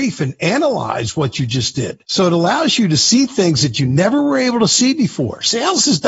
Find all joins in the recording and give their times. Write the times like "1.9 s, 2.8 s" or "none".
2.0 s